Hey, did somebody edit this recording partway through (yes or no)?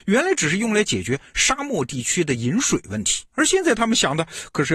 yes